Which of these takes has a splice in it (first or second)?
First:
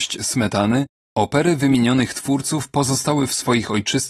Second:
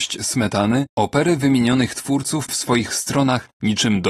second